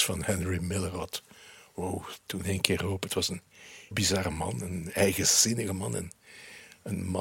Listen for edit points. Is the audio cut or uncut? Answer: cut